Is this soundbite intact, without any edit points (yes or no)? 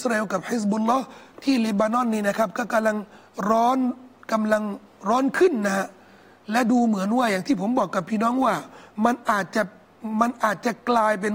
yes